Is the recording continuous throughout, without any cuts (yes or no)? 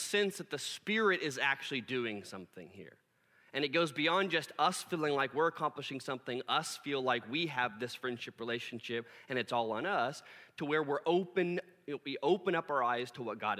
yes